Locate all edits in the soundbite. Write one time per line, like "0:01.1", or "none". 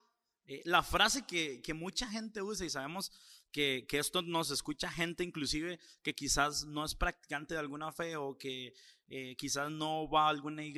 none